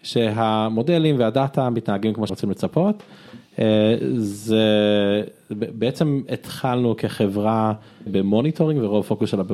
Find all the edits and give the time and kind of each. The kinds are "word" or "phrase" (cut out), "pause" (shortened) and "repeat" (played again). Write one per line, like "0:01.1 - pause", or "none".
0:02.3 - phrase
0:08.1 - word